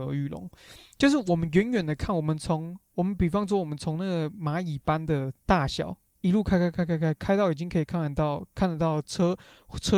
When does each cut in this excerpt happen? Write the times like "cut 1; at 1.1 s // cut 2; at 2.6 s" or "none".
cut 1; at 5.4 s